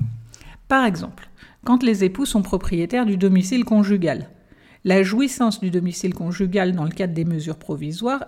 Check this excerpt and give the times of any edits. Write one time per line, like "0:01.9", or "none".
none